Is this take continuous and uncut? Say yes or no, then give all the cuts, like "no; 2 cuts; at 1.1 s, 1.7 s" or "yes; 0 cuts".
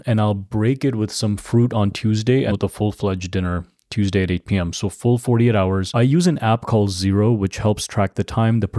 no; 1 cut; at 2.5 s